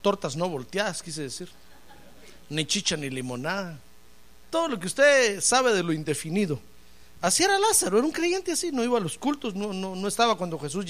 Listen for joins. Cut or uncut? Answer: uncut